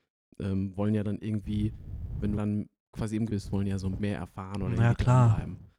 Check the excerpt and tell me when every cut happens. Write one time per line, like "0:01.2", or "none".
0:02.4
0:03.3
0:04.0